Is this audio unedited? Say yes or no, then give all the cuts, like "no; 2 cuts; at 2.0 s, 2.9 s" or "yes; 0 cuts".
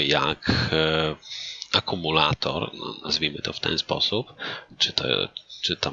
yes; 0 cuts